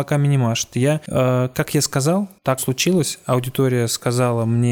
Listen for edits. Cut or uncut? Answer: cut